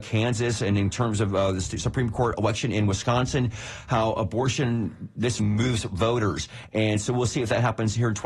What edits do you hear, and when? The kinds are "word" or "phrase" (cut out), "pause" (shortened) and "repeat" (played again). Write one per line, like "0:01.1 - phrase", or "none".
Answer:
0:05.4 - word